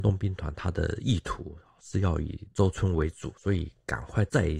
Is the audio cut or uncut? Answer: uncut